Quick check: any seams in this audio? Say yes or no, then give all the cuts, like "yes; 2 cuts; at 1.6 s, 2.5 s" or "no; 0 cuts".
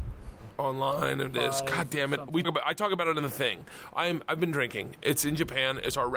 yes; 2 cuts; at 1.3 s, 2.4 s